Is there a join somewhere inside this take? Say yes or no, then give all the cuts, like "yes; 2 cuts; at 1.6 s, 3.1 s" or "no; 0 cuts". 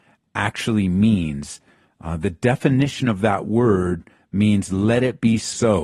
no; 0 cuts